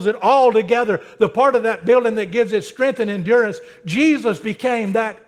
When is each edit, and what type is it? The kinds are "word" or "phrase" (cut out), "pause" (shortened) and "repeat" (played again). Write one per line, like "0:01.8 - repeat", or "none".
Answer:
none